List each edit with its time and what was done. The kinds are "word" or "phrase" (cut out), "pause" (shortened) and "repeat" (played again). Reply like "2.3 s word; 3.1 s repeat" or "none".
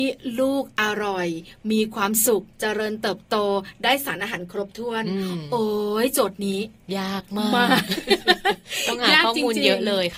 2.5 s pause